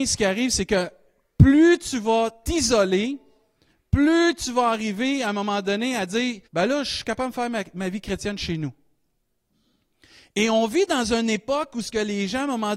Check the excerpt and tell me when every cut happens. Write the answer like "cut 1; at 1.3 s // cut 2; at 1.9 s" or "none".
cut 1; at 6.5 s